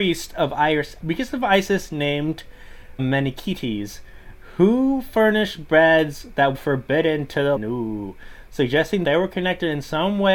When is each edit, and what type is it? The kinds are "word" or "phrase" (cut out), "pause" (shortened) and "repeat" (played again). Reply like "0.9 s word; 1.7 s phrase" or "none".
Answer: 1.0 s word; 3.0 s word; 6.5 s word; 7.6 s word; 9.0 s word